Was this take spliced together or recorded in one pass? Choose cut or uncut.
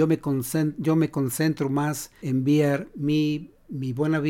cut